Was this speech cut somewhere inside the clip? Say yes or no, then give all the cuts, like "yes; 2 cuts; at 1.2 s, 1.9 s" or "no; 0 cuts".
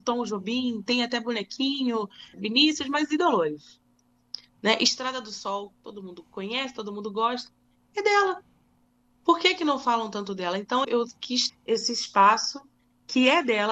yes; 3 cuts; at 2.3 s, 10.8 s, 11.5 s